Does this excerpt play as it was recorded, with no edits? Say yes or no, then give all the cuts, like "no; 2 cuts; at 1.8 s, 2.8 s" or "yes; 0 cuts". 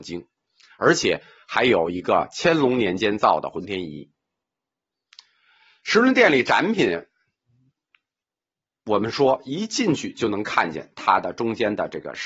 yes; 0 cuts